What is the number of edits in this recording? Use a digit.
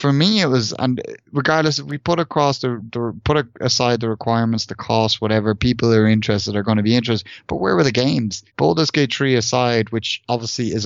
1